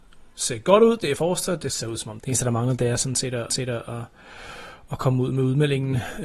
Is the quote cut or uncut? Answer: cut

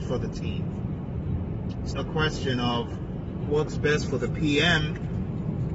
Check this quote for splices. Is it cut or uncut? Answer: cut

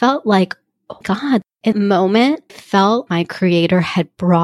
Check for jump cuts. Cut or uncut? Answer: cut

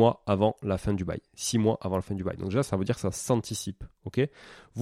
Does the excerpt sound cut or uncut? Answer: uncut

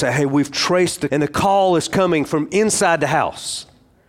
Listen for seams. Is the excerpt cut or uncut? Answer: cut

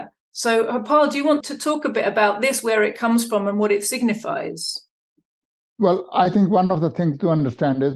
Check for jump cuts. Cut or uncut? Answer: cut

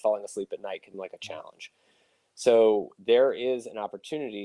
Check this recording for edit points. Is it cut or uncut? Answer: cut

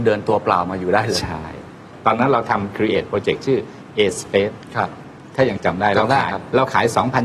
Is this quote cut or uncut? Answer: uncut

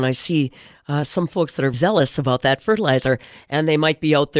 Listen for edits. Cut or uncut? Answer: cut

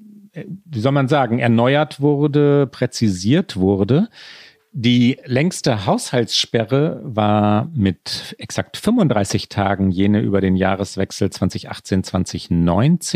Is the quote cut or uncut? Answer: uncut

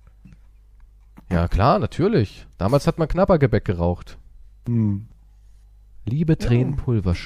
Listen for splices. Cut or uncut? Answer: cut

